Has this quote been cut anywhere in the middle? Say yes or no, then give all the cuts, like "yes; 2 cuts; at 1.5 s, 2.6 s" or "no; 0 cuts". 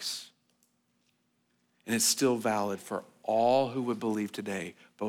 no; 0 cuts